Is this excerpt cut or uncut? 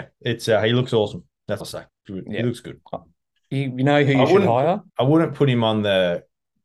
cut